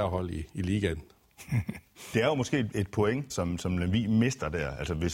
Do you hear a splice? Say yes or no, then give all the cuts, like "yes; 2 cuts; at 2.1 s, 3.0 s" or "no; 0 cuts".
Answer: yes; 3 cuts; at 2.1 s, 2.7 s, 3.3 s